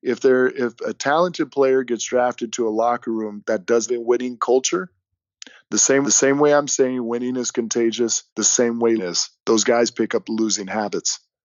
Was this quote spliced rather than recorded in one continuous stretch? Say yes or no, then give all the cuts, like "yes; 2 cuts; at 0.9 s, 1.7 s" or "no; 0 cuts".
yes; 5 cuts; at 3.9 s, 6.0 s, 8.3 s, 9.0 s, 9.4 s